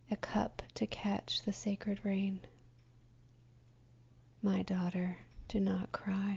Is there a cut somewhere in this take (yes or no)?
no